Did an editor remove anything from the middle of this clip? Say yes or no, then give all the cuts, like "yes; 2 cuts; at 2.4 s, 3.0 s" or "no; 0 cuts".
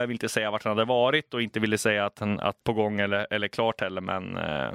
yes; 1 cut; at 2.6 s